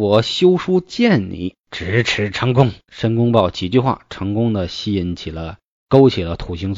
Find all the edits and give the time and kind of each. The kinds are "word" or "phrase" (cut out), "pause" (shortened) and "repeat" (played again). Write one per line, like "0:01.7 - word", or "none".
0:01.6 - pause
0:02.9 - pause